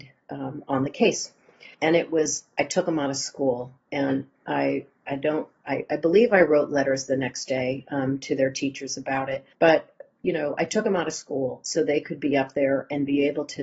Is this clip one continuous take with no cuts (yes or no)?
no